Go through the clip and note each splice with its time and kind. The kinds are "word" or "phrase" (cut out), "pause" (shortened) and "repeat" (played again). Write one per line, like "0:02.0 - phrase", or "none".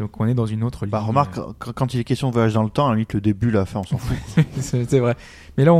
none